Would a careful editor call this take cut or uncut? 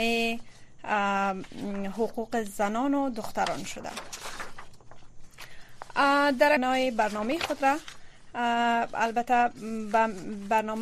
cut